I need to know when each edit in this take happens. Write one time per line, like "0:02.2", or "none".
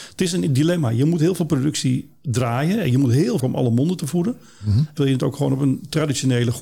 0:03.4
0:05.0